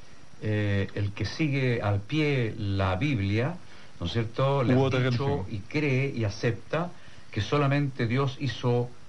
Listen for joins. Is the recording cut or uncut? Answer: cut